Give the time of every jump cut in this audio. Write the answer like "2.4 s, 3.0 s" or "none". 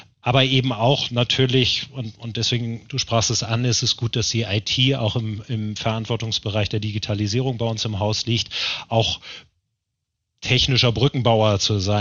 none